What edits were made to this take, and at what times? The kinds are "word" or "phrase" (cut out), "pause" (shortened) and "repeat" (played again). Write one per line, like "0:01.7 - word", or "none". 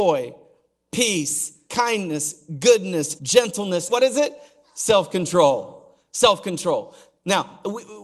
0:01.7 - word
0:03.2 - word
0:03.9 - word